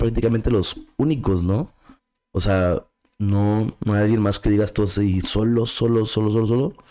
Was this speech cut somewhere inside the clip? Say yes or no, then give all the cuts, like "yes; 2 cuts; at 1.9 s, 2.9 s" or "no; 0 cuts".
no; 0 cuts